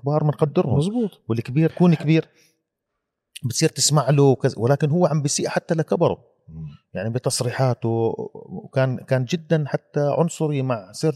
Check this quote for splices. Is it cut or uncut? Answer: cut